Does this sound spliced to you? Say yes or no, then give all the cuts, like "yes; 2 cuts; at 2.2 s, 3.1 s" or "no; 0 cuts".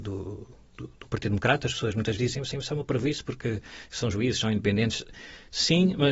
yes; 2 cuts; at 2.2 s, 2.5 s